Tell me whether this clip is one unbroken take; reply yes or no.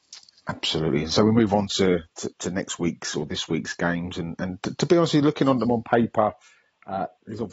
yes